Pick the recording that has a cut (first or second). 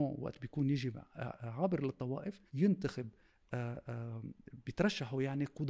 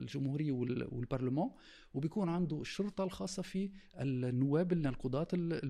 first